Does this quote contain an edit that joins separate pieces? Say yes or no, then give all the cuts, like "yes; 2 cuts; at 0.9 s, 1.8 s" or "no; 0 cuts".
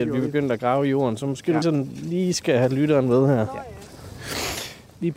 yes; 1 cut; at 1.6 s